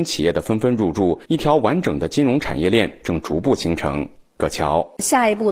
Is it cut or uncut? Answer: cut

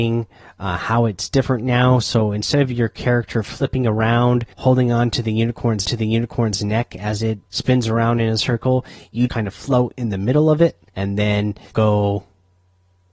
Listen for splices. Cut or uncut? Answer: cut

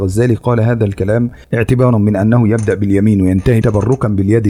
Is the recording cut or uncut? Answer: cut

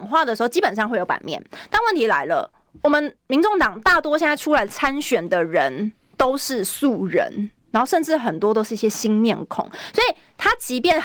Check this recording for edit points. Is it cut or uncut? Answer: uncut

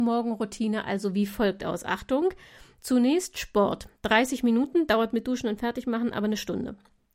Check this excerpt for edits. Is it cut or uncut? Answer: uncut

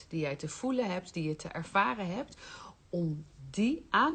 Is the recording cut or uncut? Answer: uncut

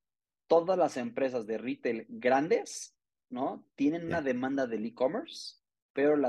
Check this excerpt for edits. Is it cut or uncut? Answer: uncut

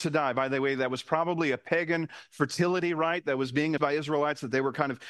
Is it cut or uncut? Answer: cut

